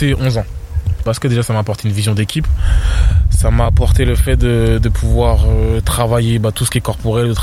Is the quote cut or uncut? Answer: uncut